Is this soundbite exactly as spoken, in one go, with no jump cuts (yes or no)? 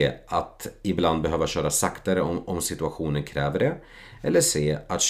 yes